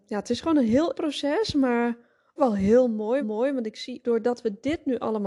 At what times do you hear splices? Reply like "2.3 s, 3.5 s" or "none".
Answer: 0.9 s, 2.4 s, 3.2 s, 4.0 s